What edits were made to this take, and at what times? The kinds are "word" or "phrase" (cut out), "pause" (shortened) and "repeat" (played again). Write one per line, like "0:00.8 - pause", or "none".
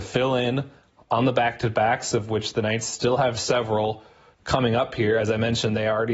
none

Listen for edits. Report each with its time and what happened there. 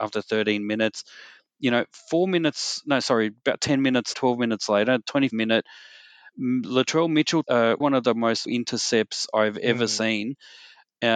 0:04.1 - word
0:05.3 - word
0:06.3 - word
0:07.4 - word
0:07.8 - word
0:08.5 - word

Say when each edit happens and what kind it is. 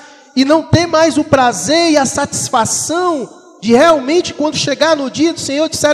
none

